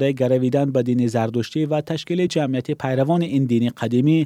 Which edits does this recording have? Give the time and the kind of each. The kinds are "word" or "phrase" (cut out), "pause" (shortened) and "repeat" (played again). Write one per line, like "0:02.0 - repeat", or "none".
none